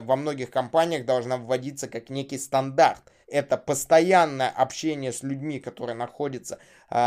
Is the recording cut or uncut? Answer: cut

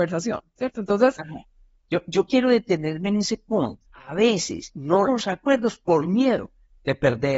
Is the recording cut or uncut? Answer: cut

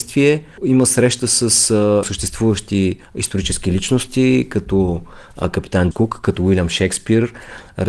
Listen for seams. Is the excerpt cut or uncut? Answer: cut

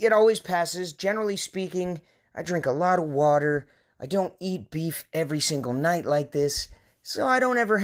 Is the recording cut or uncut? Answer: uncut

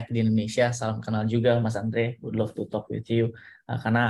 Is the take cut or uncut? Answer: uncut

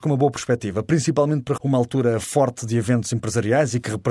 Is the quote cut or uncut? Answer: cut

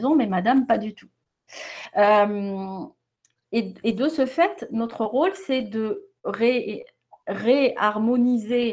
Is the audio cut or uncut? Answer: uncut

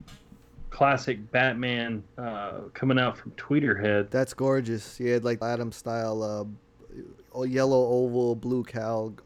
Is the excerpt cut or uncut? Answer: cut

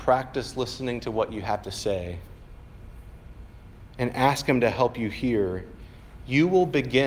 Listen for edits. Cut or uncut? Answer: uncut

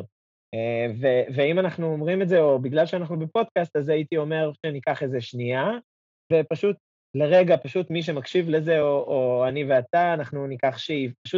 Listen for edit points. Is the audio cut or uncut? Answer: uncut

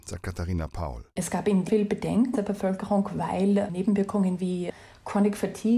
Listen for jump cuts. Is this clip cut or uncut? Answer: cut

